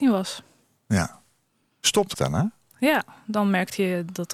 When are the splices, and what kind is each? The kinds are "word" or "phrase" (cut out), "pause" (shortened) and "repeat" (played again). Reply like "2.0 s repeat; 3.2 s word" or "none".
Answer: 2.1 s word